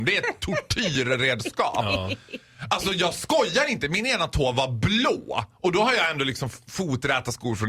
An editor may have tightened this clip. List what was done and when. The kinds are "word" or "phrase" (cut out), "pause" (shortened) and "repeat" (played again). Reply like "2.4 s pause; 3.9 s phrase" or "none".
none